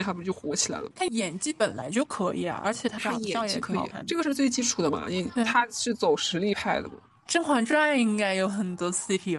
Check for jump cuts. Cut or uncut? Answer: cut